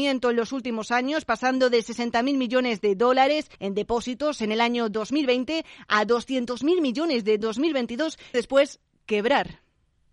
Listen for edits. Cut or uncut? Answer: cut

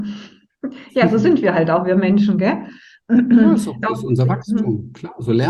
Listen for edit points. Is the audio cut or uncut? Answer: cut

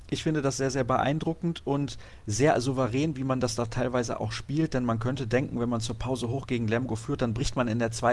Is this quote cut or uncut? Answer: uncut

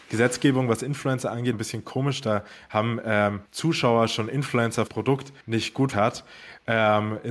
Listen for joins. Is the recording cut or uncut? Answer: cut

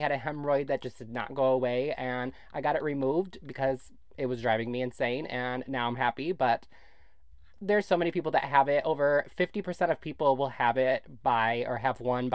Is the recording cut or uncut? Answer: uncut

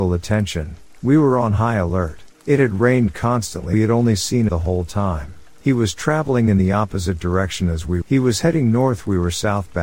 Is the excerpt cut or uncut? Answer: cut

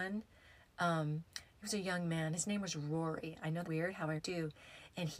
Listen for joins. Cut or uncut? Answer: cut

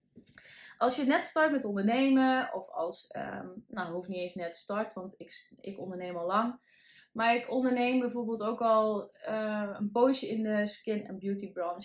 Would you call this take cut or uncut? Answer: uncut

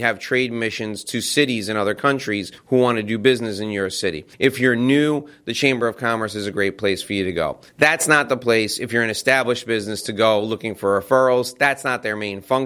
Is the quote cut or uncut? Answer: cut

